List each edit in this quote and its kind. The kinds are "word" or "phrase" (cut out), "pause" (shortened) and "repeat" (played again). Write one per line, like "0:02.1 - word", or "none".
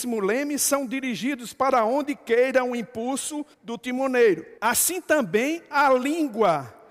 0:03.5 - pause
0:04.6 - pause

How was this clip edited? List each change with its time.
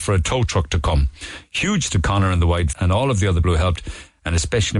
0:01.9 - word
0:02.7 - word
0:03.4 - word

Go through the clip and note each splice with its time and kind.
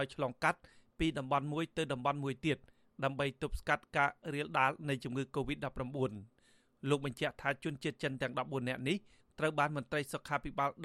none

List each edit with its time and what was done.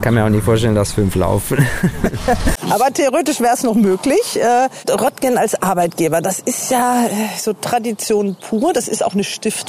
none

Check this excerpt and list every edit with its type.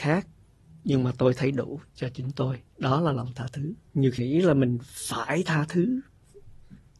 0:02.7 - pause
0:03.9 - pause
0:04.2 - word

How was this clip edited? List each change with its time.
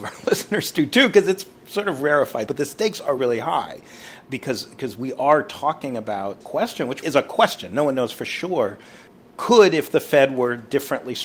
0:02.5 - word
0:03.2 - word
0:04.3 - word
0:06.4 - word
0:07.0 - word
0:09.1 - pause

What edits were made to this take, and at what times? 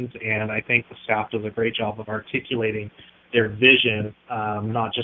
none

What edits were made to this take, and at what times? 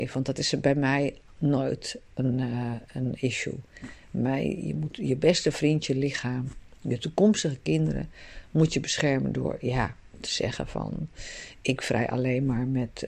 none

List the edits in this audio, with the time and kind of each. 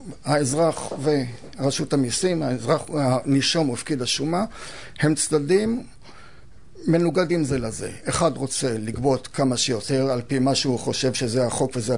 none

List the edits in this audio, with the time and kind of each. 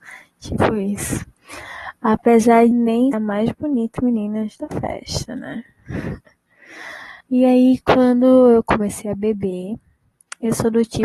0:02.7 - word
0:03.1 - word
0:04.0 - word
0:07.2 - pause

